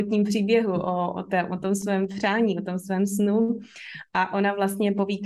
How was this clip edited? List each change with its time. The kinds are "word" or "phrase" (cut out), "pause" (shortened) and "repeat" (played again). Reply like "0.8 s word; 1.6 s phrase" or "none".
none